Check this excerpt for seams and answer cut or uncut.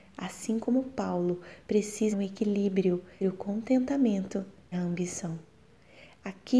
cut